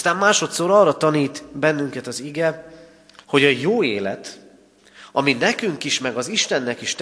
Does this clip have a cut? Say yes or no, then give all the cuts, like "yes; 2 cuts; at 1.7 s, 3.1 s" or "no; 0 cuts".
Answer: yes; 1 cut; at 3.2 s